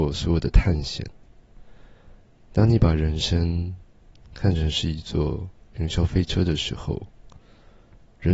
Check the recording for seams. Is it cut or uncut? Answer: uncut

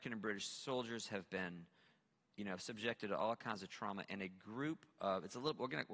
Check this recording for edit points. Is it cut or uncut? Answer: uncut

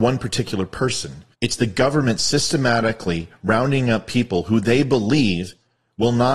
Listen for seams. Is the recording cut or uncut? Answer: cut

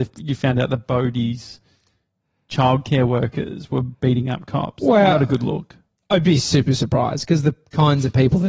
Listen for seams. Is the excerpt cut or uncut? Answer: uncut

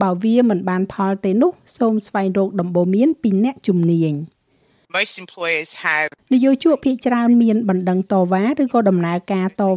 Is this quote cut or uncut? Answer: uncut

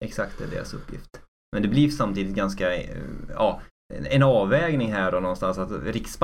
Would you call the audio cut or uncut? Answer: uncut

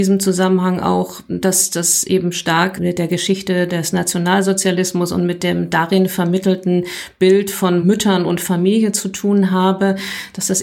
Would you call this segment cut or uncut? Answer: uncut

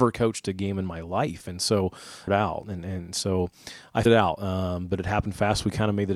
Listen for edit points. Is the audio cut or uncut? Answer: cut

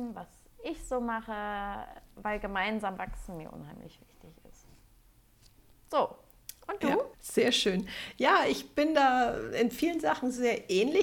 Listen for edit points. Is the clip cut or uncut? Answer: cut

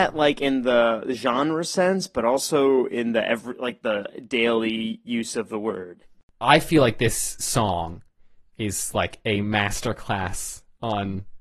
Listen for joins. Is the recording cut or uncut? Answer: uncut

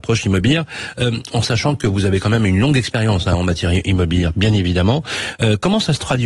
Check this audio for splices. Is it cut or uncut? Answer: uncut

